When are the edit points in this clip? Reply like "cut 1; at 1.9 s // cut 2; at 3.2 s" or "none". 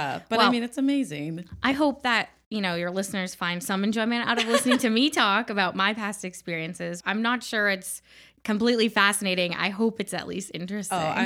cut 1; at 7.0 s